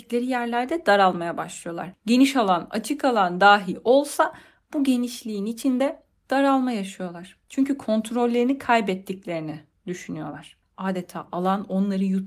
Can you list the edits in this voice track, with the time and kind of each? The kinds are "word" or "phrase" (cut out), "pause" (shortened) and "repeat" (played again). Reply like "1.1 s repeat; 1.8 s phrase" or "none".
none